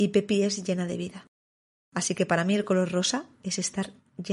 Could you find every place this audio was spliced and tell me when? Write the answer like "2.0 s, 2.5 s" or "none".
none